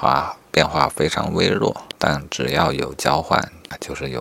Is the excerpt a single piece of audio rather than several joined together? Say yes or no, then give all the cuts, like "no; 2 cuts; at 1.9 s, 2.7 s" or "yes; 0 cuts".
no; 1 cut; at 2.0 s